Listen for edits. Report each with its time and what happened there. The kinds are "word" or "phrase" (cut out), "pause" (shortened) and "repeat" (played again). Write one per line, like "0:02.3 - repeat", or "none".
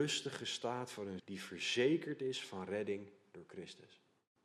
0:01.2 - word